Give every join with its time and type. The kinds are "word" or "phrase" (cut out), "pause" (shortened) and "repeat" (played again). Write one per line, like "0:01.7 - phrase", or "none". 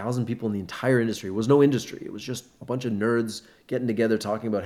none